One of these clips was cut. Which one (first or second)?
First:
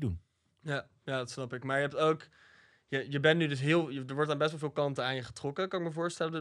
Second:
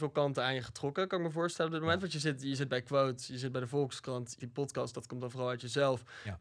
second